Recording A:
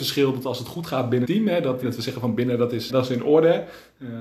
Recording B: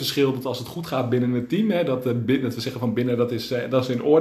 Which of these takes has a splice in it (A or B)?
A